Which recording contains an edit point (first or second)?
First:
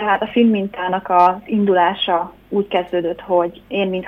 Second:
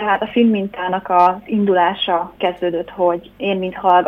second